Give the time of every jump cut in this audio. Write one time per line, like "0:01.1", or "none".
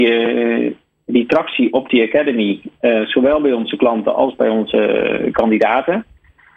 none